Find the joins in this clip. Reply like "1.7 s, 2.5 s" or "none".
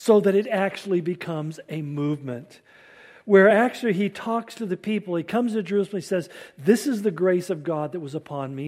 none